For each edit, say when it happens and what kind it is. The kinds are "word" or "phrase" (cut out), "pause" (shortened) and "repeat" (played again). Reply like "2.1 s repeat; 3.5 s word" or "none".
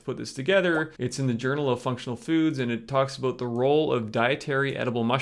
0.9 s pause